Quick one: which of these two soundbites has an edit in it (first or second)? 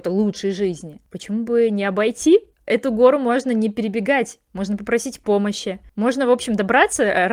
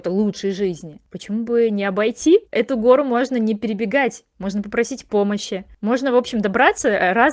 second